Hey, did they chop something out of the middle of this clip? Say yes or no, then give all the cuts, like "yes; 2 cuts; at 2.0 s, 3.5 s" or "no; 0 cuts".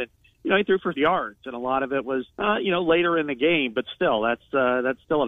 yes; 2 cuts; at 0.9 s, 2.3 s